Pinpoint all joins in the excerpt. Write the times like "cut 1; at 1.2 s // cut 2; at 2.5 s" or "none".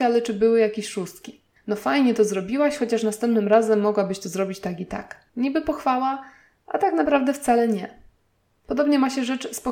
cut 1; at 5.3 s